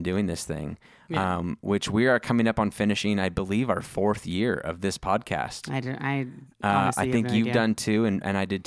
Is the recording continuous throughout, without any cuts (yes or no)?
yes